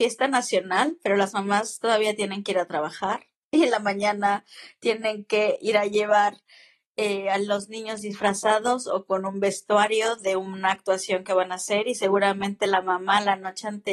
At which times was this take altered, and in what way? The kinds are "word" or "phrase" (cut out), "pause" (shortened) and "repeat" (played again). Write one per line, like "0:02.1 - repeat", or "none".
none